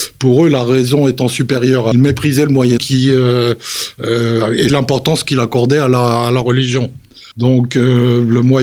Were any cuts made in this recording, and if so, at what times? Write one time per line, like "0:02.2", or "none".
0:01.9
0:02.8
0:04.7
0:07.3